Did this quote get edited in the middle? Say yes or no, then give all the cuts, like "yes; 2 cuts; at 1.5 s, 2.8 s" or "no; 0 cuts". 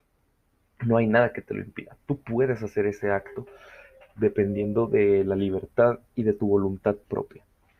no; 0 cuts